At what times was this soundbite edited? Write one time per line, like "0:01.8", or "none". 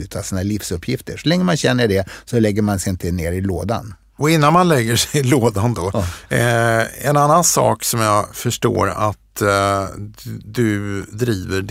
none